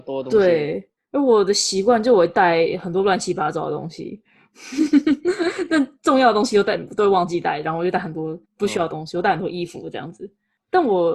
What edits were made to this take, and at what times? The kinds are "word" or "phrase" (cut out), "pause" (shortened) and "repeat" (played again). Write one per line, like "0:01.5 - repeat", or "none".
0:08.4 - pause